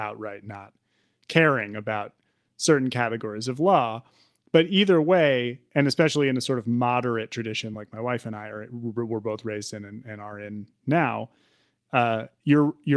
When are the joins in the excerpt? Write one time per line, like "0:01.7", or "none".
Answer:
none